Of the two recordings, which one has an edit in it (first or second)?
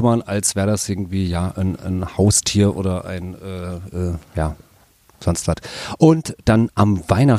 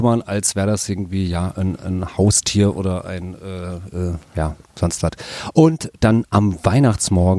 second